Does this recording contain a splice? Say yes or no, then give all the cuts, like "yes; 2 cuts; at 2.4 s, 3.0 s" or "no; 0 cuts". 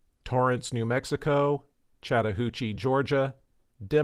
no; 0 cuts